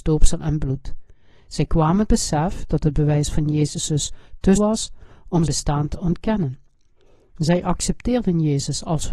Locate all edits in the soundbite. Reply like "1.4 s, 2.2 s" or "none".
2.1 s, 4.6 s, 5.5 s